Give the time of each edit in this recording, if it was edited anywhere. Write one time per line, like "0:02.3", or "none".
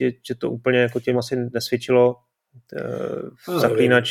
0:01.1

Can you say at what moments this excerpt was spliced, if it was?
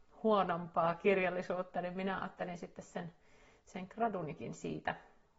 none

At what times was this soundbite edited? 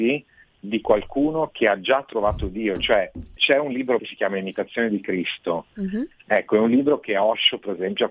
0:03.4
0:04.0

